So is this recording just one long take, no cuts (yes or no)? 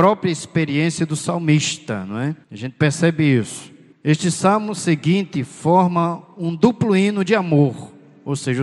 no